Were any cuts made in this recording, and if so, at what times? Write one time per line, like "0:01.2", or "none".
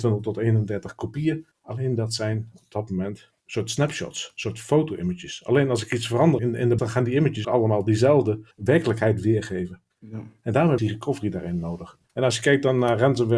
0:01.5
0:03.4
0:06.4
0:06.8
0:07.4
0:08.5
0:09.9
0:10.8
0:12.0